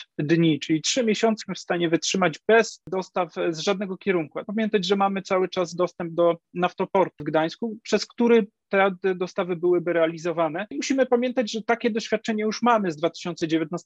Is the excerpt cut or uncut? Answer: cut